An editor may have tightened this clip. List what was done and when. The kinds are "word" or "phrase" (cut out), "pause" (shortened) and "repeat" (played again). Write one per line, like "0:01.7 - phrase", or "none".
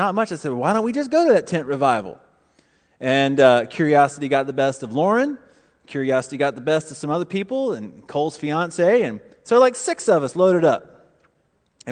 none